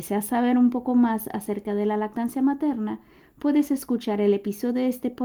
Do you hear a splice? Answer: no; 0 cuts

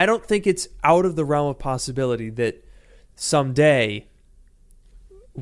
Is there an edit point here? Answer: no; 0 cuts

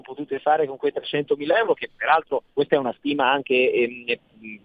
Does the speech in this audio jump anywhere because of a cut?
yes; 1 cut; at 2.5 s

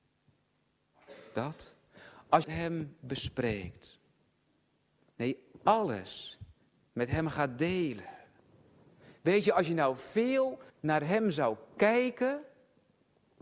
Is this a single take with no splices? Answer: no; 2 cuts; at 2.4 s, 10.7 s

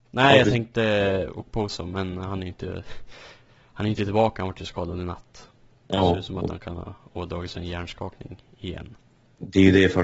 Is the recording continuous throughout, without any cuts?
yes; 0 cuts

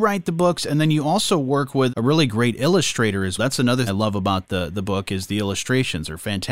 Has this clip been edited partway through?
yes; 3 cuts; at 1.9 s, 3.4 s, 3.9 s

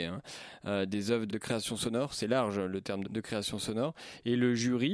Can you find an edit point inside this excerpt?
yes; 2 cuts; at 1.3 s, 3.0 s

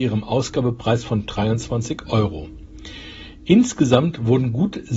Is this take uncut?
yes; 0 cuts

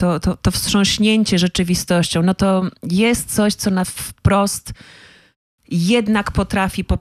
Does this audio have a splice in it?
no; 0 cuts

